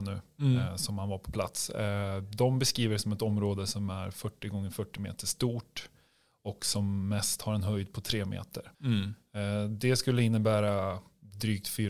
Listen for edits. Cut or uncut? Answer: cut